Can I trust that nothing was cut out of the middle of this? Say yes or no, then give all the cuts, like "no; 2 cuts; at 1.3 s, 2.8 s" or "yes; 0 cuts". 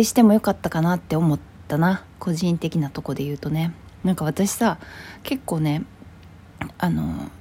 no; 1 cut; at 2.1 s